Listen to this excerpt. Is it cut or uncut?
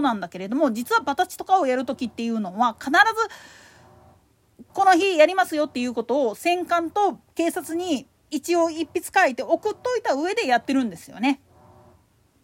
cut